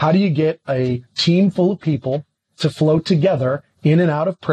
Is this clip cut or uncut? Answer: uncut